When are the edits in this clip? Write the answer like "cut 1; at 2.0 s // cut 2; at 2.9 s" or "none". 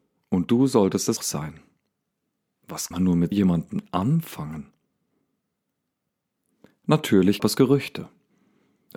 cut 1; at 1.2 s // cut 2; at 2.9 s // cut 3; at 3.3 s // cut 4; at 7.4 s

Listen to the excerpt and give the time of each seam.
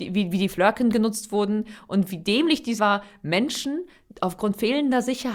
cut 1; at 2.8 s

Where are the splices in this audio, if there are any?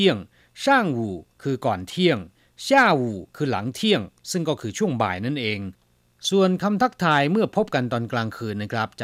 cut 1; at 1.3 s // cut 2; at 3.3 s

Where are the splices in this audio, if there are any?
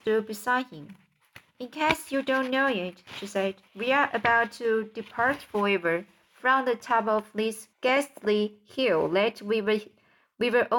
cut 1; at 1.5 s // cut 2; at 3.7 s // cut 3; at 7.7 s

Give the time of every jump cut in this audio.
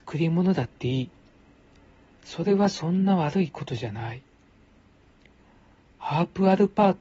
none

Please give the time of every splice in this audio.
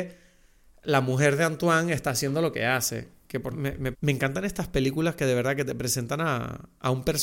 cut 1; at 3.5 s // cut 2; at 3.9 s

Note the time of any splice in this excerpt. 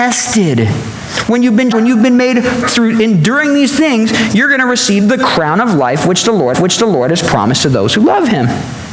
cut 1; at 1.7 s // cut 2; at 2.6 s // cut 3; at 6.5 s

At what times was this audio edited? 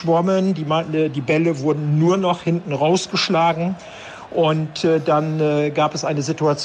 none

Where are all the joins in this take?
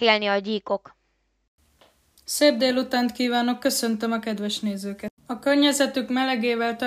cut 1; at 5.2 s

